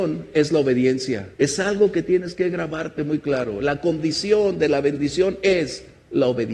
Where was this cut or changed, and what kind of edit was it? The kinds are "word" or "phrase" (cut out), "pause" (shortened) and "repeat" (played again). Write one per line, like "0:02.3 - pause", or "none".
0:01.3 - pause